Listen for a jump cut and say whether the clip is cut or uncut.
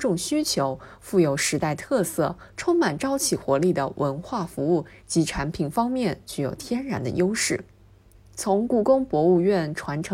uncut